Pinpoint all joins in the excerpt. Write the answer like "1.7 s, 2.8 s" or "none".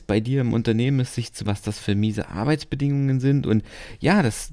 1.5 s